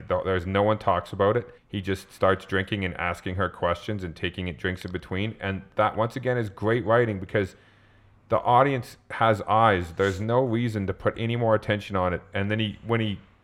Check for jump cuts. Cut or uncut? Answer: cut